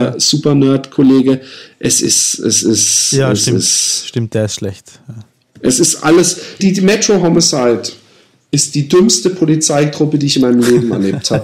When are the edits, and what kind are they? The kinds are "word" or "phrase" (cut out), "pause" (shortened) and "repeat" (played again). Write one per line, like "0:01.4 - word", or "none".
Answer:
0:06.6 - word